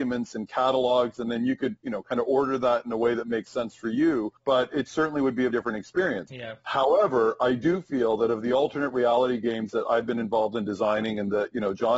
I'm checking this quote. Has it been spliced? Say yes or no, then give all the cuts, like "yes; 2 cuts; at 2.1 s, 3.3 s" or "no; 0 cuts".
yes; 2 cuts; at 4.4 s, 5.5 s